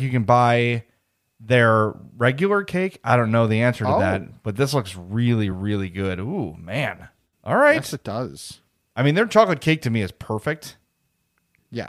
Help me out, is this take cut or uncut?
uncut